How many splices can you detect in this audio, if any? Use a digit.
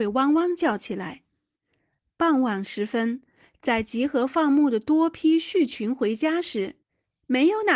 0